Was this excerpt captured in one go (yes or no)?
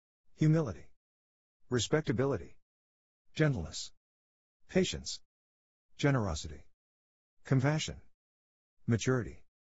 yes